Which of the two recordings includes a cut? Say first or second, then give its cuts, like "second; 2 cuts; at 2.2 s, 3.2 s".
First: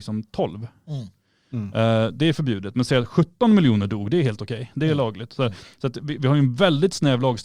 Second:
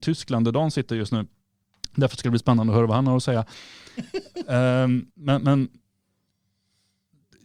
second; 1 cut; at 5.1 s